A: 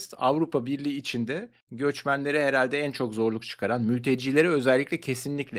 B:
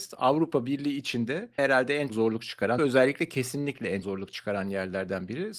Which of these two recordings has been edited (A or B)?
B